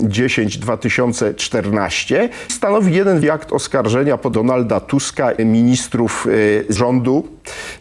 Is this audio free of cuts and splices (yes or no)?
no